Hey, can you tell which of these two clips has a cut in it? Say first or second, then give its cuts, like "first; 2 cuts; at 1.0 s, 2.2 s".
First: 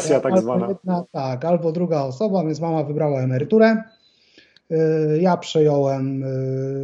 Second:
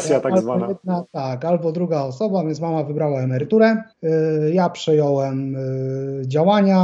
second; 1 cut; at 3.9 s